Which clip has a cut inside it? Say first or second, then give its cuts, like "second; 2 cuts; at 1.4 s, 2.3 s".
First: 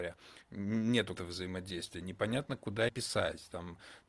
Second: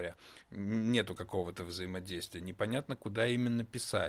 first; 2 cuts; at 1.2 s, 2.9 s